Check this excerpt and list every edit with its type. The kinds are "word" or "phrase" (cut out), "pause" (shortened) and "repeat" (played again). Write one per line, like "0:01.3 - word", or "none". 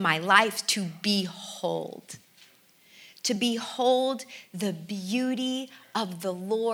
none